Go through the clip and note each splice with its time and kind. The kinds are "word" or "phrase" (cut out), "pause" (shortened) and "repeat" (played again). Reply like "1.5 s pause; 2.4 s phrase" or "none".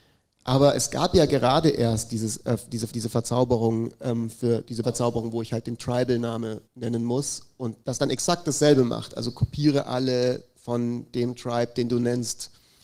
2.9 s repeat; 4.8 s word; 6.6 s pause; 7.8 s pause